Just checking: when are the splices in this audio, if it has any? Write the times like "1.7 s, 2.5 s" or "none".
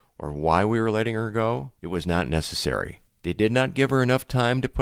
1.8 s, 3.1 s